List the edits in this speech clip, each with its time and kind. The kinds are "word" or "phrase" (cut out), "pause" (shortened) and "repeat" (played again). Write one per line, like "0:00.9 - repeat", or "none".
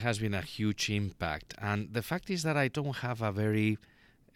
none